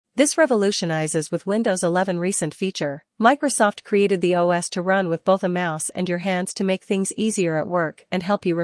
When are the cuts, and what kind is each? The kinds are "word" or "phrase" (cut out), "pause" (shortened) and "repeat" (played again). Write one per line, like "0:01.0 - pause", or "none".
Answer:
0:03.1 - pause